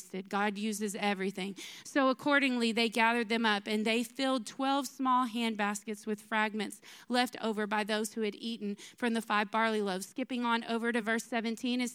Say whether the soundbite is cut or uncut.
uncut